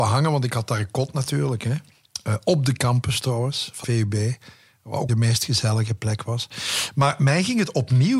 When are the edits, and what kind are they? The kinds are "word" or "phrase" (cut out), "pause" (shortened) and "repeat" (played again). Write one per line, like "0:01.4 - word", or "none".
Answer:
0:03.8 - word
0:05.1 - phrase